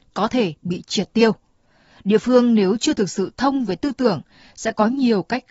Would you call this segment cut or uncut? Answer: uncut